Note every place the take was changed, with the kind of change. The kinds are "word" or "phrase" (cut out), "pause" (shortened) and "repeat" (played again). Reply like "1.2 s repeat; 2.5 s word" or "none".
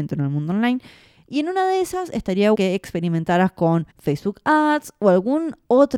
2.5 s word; 3.9 s pause